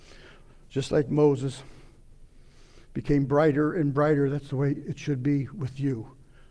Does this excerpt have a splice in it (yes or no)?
no